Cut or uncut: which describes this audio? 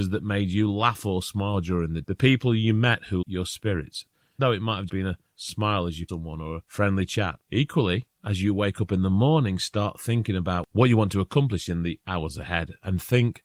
cut